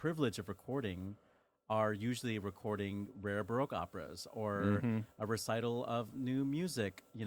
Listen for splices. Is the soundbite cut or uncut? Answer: uncut